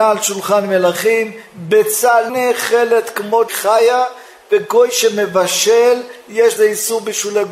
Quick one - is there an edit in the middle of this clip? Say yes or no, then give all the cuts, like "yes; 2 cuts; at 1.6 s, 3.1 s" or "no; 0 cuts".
yes; 3 cuts; at 2.3 s, 3.5 s, 6.6 s